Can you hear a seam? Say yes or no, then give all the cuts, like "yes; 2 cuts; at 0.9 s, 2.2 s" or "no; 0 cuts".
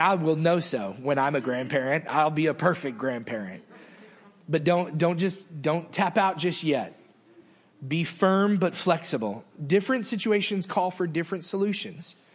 no; 0 cuts